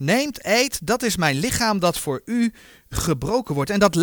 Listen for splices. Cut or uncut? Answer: uncut